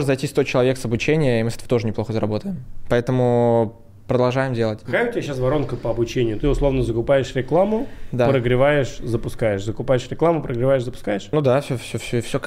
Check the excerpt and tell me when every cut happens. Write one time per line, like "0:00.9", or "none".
0:06.4